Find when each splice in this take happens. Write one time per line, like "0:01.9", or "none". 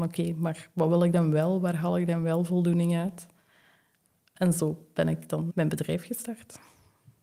0:05.5

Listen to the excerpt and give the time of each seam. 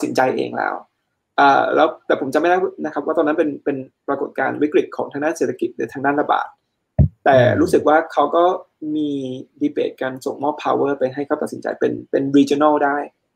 none

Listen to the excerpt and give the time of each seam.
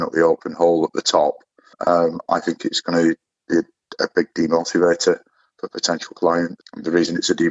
none

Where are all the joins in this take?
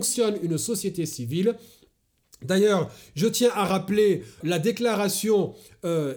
0:04.4

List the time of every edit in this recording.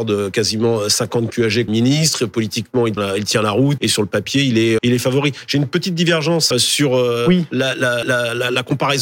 0:01.7
0:03.0
0:03.8
0:04.8
0:06.5
0:08.0

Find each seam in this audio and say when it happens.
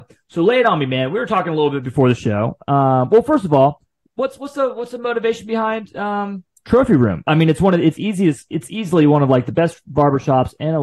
none

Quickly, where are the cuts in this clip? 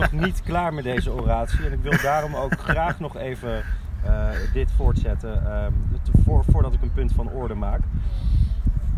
none

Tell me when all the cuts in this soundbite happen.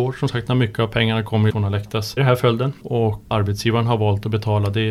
0:01.5
0:02.2
0:03.3

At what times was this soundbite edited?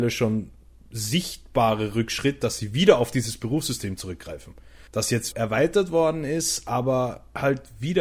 0:04.9
0:05.3

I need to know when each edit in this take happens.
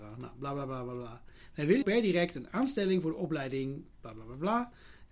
0:01.8

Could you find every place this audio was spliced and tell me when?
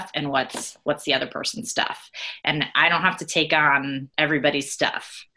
0:04.1

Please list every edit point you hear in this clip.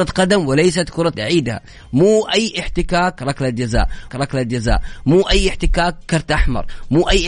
0:01.1
0:04.1

